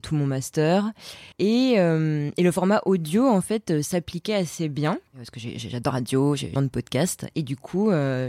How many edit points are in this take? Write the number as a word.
four